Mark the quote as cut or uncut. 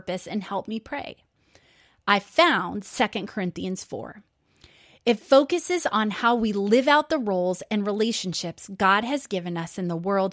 uncut